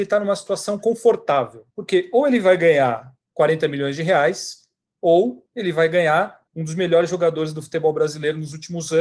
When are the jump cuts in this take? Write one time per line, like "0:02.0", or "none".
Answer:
0:01.7
0:05.5
0:06.5